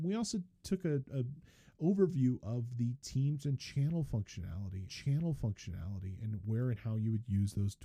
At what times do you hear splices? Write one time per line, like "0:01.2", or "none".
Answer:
0:04.9